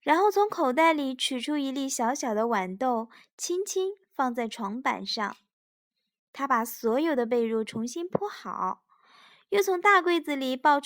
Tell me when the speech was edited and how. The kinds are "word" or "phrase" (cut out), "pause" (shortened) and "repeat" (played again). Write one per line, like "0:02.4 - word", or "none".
none